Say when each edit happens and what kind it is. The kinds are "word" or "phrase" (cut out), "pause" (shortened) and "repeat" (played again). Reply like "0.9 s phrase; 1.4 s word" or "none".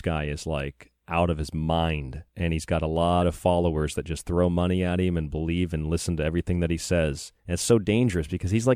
1.0 s pause; 2.3 s pause; 7.4 s pause